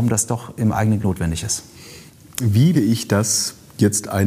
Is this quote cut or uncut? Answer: cut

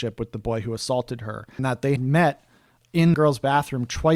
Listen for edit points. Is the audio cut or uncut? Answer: cut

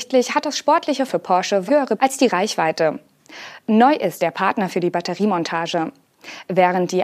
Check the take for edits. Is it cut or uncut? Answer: cut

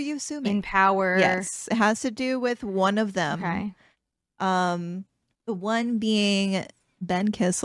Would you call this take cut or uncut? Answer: cut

